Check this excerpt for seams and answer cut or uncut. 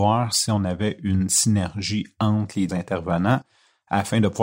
cut